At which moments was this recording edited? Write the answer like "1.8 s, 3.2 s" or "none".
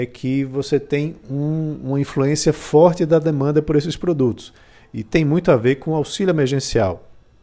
none